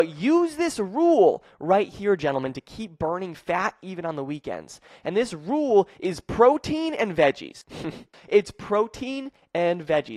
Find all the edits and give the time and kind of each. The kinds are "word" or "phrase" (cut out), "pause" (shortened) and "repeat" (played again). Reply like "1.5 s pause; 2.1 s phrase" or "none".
none